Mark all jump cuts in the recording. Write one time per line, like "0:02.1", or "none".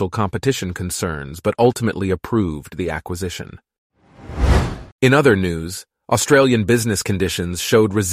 0:04.9